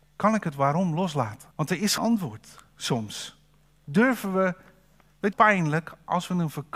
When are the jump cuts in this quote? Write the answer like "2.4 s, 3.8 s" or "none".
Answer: 1.5 s, 2.0 s, 3.7 s, 5.3 s